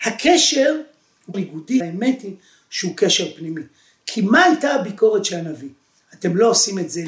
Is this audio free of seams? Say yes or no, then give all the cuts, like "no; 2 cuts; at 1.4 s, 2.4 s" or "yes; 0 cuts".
no; 2 cuts; at 1.3 s, 1.8 s